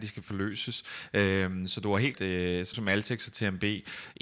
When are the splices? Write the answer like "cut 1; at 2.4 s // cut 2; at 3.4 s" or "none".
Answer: cut 1; at 2.1 s // cut 2; at 2.7 s